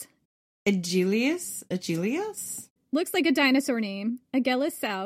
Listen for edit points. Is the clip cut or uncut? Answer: uncut